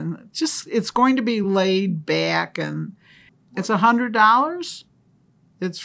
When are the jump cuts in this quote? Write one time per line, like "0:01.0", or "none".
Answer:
none